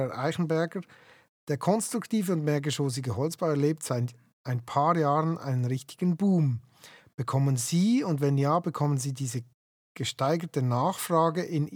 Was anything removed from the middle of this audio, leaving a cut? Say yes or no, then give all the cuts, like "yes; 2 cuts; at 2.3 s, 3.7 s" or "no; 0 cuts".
no; 0 cuts